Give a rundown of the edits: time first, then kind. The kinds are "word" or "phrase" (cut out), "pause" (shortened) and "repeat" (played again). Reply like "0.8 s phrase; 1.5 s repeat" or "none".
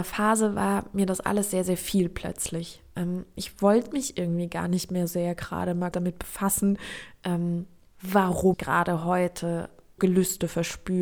5.1 s word; 5.9 s word; 8.5 s word; 10.0 s word